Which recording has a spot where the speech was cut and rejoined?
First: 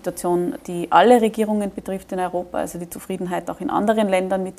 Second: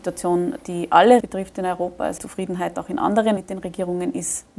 second; 3 cuts; at 1.2 s, 2.2 s, 3.4 s

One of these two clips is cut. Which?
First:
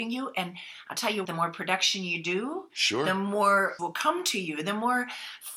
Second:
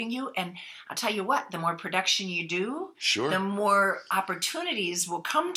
first; 2 cuts; at 1.2 s, 3.8 s

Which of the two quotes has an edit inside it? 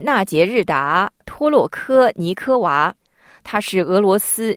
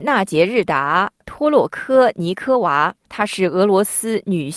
second; 1 cut; at 3.0 s

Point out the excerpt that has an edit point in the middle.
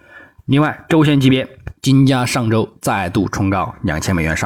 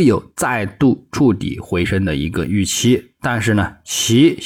first; 1 cut; at 1.8 s

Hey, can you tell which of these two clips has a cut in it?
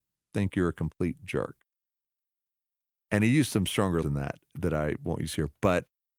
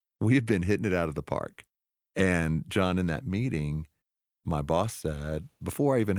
first; 1 cut; at 4.0 s

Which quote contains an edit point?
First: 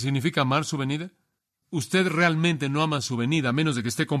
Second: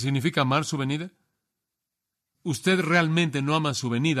first; 1 cut; at 1.4 s

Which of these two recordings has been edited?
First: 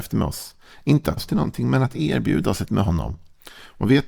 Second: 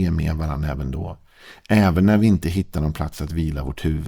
first; 2 cuts; at 1.2 s, 2.7 s

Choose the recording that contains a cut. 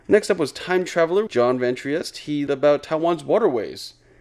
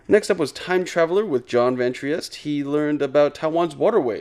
first; 2 cuts; at 1.3 s, 2.5 s

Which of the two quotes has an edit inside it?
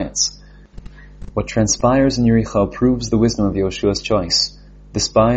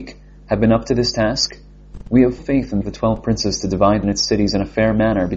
second; 3 cuts; at 2.4 s, 2.8 s, 4.0 s

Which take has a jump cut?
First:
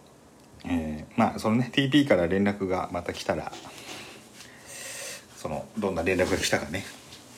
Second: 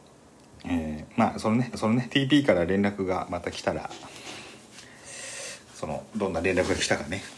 second; 1 cut; at 1.7 s

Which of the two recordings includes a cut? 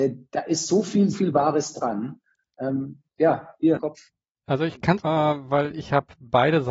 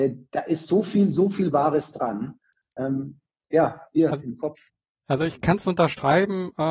first; 4 cuts; at 1.1 s, 3.1 s, 3.8 s, 5.0 s

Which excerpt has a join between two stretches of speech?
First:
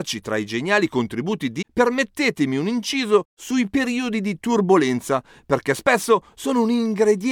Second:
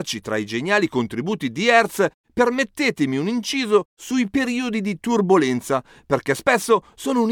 first; 1 cut; at 1.6 s

